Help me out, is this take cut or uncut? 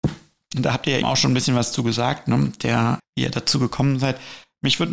cut